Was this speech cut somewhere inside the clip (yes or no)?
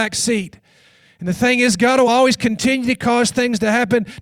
no